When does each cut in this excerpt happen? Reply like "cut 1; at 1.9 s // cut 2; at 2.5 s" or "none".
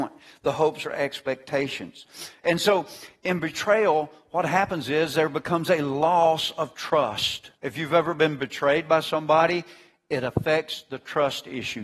cut 1; at 7.6 s